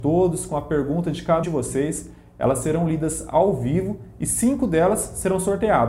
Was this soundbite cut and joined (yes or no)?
yes